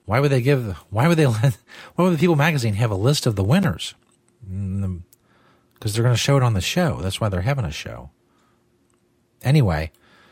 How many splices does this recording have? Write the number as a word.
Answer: zero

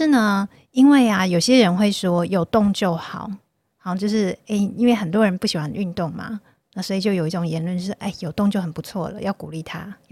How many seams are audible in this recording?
zero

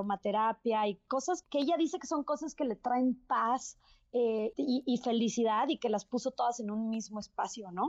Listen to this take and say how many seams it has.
two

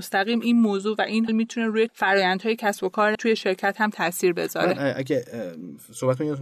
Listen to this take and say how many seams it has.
three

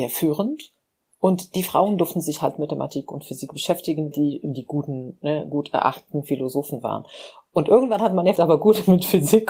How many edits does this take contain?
two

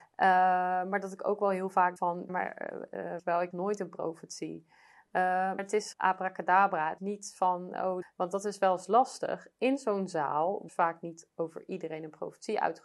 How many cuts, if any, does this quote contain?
nine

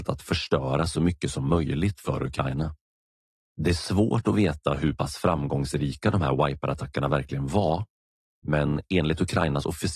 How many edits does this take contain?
zero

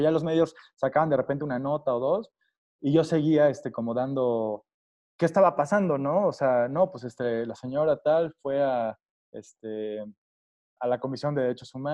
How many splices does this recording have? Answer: one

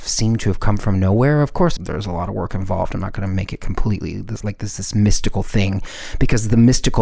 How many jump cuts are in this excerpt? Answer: one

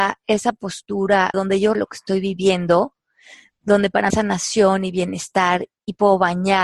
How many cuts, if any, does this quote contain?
three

